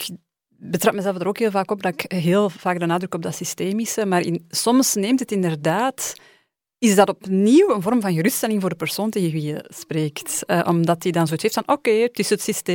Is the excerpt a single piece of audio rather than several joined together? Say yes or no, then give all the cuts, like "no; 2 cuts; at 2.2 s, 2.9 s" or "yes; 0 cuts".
yes; 0 cuts